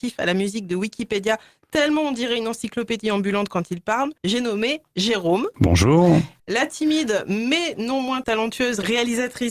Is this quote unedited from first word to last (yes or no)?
no